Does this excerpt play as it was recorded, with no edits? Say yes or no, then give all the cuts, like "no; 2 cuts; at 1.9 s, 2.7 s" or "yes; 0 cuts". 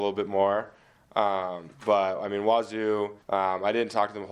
no; 2 cuts; at 1.7 s, 3.2 s